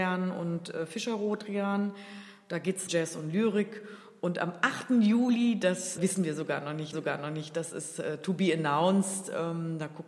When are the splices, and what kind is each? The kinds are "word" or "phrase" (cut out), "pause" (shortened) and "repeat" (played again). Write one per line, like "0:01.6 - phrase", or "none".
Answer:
0:02.9 - word
0:06.0 - word
0:06.9 - repeat